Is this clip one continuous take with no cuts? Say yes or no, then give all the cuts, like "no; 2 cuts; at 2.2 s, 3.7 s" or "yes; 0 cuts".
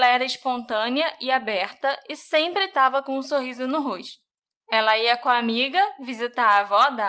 yes; 0 cuts